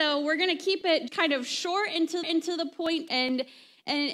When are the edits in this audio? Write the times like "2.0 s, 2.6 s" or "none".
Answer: 1.1 s, 2.2 s, 3.1 s